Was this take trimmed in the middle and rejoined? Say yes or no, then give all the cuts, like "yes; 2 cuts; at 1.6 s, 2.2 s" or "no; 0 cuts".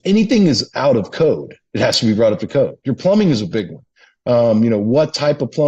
no; 0 cuts